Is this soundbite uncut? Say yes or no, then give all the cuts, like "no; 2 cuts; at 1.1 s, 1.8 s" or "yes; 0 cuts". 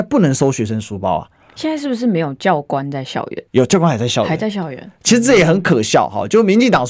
no; 1 cut; at 3.5 s